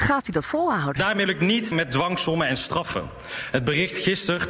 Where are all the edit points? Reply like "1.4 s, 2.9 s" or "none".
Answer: 1.3 s, 1.7 s